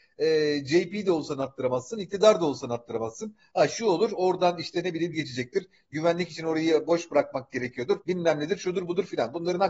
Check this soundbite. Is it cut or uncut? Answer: cut